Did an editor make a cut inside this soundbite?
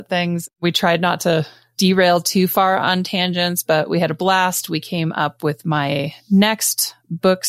no; 0 cuts

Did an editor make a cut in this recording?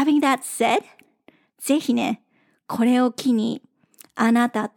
no; 0 cuts

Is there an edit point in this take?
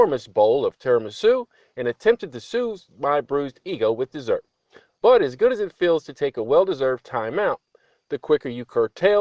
no; 0 cuts

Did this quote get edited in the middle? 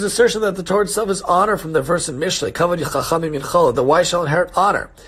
no; 0 cuts

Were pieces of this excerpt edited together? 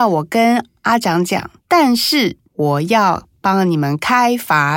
yes; 2 cuts; at 1.6 s, 2.4 s

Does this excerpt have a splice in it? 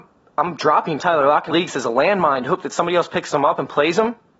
yes; 1 cut; at 1.5 s

